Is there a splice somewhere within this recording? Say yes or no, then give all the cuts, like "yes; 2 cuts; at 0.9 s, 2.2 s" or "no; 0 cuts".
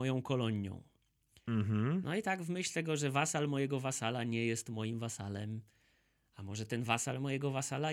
no; 0 cuts